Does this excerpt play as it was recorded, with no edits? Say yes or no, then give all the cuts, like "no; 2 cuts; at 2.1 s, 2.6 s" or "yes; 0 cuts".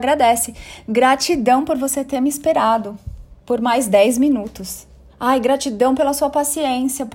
no; 2 cuts; at 3.4 s, 5.1 s